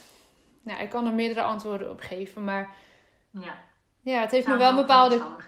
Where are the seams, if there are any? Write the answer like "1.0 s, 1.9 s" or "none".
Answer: none